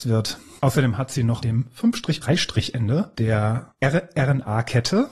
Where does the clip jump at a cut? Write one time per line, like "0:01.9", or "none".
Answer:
0:01.4
0:02.2